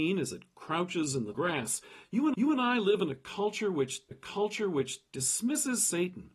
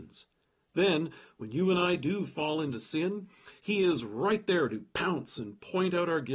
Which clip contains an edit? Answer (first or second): first